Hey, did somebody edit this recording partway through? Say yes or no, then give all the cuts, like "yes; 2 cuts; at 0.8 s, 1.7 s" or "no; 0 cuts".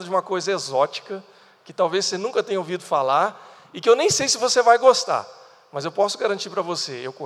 no; 0 cuts